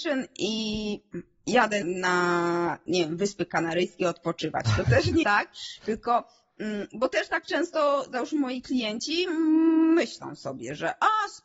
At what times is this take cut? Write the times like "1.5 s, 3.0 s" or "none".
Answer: 1.8 s, 5.2 s